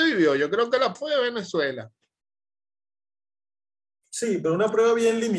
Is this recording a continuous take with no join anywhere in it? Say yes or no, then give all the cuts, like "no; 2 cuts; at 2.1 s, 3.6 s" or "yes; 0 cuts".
no; 1 cut; at 0.9 s